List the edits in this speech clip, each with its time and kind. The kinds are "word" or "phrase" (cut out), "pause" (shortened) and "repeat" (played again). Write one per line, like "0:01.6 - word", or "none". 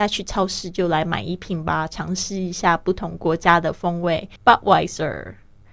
0:04.4 - pause